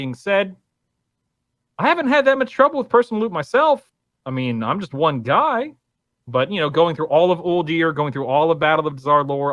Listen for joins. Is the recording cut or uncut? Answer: uncut